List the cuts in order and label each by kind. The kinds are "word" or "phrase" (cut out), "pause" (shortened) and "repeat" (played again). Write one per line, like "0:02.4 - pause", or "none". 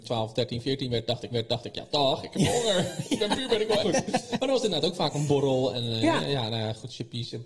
0:01.3 - repeat
0:03.8 - phrase